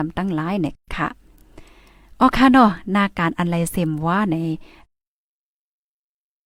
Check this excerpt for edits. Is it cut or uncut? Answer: uncut